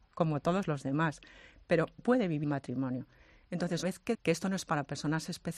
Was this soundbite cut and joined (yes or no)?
yes